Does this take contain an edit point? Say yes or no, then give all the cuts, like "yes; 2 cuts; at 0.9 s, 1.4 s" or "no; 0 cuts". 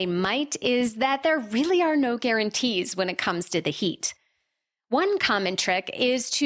no; 0 cuts